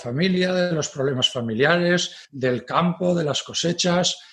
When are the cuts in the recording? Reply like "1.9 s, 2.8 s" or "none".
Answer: 2.2 s